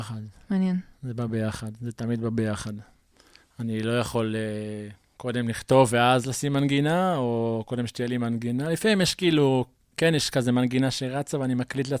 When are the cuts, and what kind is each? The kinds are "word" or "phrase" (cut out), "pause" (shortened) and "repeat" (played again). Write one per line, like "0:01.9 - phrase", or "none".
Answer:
none